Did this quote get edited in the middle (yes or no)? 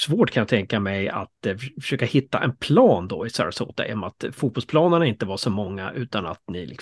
no